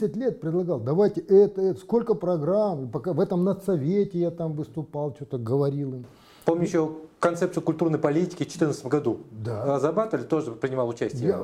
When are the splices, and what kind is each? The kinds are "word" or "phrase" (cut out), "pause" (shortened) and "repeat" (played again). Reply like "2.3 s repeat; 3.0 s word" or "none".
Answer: none